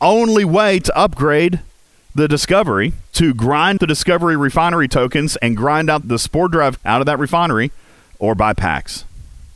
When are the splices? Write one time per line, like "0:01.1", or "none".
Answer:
0:03.1
0:03.8
0:06.0
0:06.8